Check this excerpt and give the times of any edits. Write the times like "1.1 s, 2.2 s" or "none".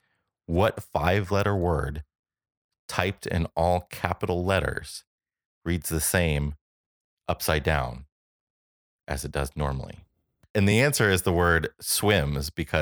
none